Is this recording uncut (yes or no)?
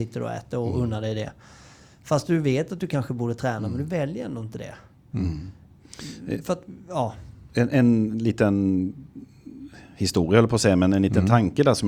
yes